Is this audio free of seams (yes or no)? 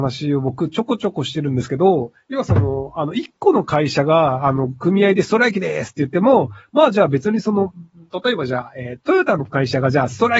no